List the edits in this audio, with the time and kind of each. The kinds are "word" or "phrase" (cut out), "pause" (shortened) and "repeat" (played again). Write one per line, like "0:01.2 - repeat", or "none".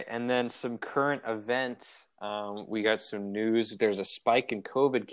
none